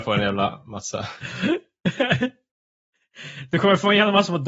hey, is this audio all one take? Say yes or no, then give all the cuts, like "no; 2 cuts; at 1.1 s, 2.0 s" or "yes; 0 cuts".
yes; 0 cuts